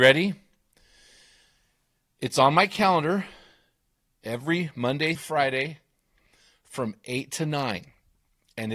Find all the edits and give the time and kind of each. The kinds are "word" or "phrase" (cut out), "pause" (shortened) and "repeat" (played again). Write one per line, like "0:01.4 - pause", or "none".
0:05.1 - word